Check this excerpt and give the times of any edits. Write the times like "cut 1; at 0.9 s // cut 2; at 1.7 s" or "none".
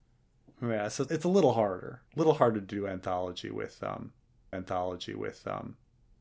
cut 1; at 1.1 s // cut 2; at 2.1 s // cut 3; at 4.5 s